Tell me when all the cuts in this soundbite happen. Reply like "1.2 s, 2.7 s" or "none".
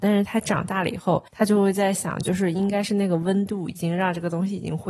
1.3 s